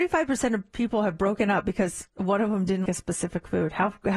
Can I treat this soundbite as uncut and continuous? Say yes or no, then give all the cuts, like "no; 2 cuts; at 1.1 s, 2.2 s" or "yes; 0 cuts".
no; 1 cut; at 2.9 s